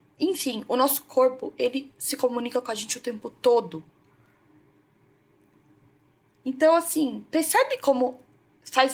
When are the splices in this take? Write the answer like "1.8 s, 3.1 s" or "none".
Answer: none

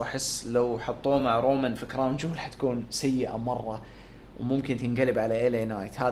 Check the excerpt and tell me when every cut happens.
none

